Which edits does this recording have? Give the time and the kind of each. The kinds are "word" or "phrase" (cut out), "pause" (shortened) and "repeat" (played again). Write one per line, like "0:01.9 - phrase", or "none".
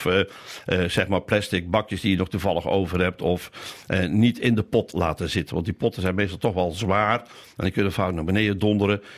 none